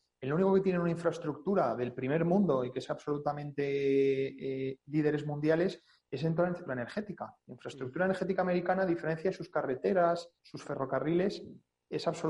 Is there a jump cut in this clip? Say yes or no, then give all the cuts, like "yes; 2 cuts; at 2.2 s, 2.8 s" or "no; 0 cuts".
yes; 3 cuts; at 6.7 s, 7.4 s, 10.4 s